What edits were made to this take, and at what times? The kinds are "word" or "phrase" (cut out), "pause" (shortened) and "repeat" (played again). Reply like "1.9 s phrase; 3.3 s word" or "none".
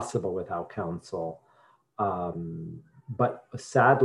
none